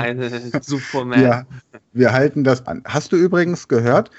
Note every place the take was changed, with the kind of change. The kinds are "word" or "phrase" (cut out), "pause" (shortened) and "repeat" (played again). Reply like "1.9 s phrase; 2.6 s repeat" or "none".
2.6 s word

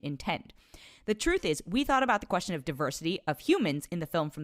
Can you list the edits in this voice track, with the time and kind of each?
none

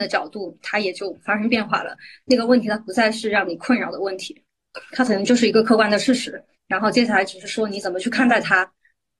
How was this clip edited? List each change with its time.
6.5 s pause

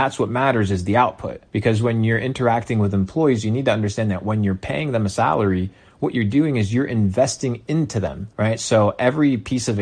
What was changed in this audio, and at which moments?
1.5 s pause; 8.3 s pause

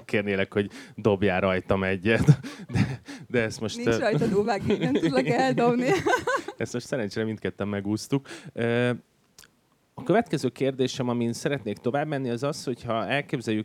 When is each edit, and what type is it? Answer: none

